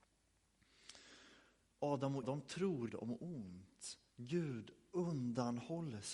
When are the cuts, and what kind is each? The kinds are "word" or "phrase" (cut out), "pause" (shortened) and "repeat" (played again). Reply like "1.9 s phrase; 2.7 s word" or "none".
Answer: 2.2 s word; 2.9 s word